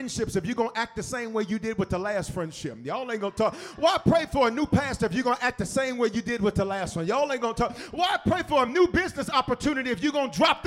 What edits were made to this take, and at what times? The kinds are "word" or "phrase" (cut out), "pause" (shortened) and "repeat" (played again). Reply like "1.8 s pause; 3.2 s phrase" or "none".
none